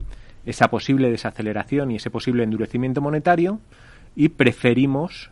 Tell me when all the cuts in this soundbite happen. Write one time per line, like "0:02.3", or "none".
none